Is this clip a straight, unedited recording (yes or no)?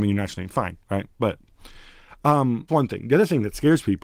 no